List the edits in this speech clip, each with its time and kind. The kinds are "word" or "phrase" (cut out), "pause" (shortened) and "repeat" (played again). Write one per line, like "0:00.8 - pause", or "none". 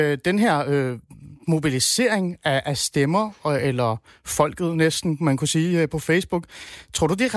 none